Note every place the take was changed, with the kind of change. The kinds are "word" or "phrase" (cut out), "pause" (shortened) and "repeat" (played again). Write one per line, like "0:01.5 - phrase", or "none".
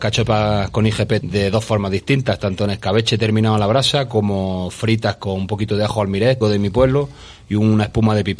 0:01.2 - word
0:06.4 - word